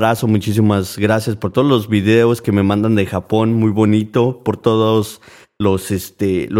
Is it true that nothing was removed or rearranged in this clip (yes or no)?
yes